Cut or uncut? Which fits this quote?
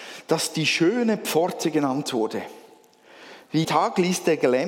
cut